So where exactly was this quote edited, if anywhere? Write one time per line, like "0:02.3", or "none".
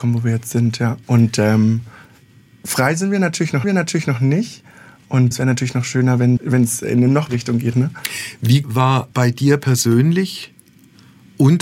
0:01.0
0:03.6
0:05.3
0:06.4
0:07.3
0:07.7
0:08.6
0:09.1